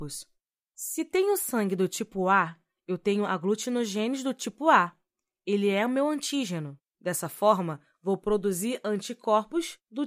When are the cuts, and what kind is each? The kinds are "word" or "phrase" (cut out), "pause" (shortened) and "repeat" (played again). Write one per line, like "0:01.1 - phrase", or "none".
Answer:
none